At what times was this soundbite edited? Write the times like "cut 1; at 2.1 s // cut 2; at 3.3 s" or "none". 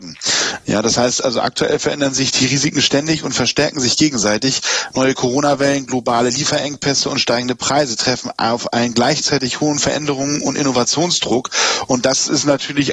none